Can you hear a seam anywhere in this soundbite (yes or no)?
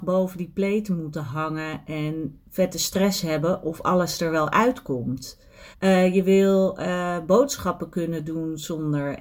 yes